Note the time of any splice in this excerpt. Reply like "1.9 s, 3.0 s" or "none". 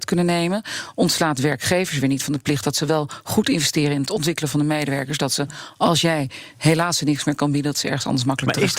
none